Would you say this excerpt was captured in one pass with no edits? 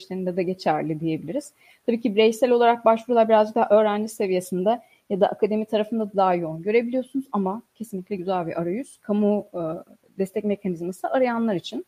yes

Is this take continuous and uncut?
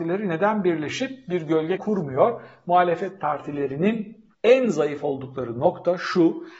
no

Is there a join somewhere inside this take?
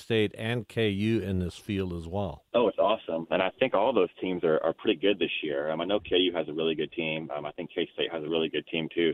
yes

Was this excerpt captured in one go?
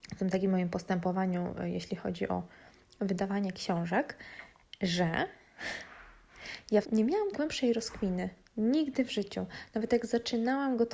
no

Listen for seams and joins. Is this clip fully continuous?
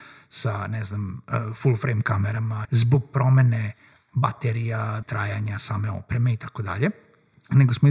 no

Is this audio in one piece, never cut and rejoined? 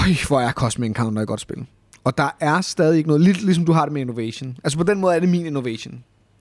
yes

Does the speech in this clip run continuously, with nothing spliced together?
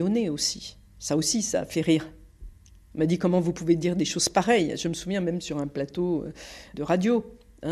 yes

